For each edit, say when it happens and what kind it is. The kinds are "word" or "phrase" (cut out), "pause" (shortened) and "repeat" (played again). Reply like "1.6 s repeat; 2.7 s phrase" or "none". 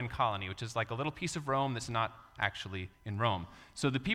2.9 s pause